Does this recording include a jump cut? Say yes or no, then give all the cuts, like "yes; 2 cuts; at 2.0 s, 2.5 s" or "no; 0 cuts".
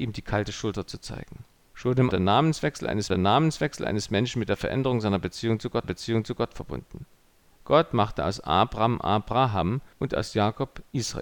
yes; 5 cuts; at 1.5 s, 2.1 s, 3.1 s, 5.8 s, 9.9 s